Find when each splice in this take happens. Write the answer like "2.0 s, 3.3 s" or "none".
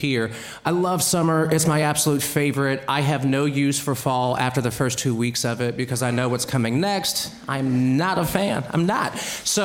none